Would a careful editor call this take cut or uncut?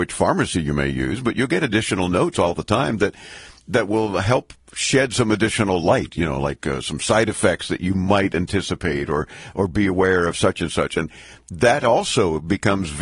uncut